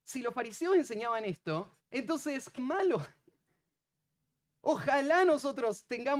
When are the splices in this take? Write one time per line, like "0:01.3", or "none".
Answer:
0:01.8
0:02.6